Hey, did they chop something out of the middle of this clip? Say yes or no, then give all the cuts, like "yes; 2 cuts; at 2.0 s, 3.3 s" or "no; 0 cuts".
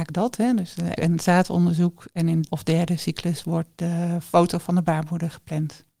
yes; 2 cuts; at 1.0 s, 2.5 s